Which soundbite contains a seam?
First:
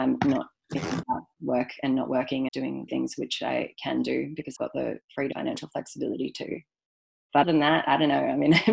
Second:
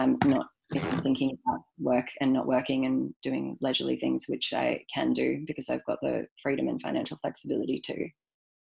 first; 6 cuts; at 1.0 s, 2.5 s, 2.9 s, 4.6 s, 5.3 s, 7.4 s

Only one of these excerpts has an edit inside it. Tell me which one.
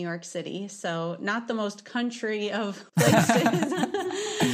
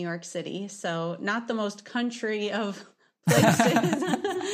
first; 1 cut; at 2.9 s

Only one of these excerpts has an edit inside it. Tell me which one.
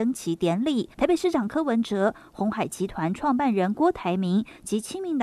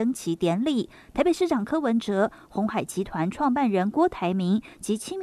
first; 1 cut; at 0.9 s

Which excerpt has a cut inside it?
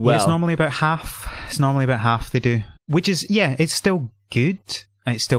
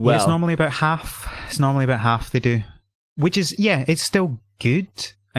first; 1 cut; at 2.8 s

